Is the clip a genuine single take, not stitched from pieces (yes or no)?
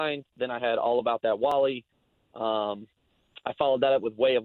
yes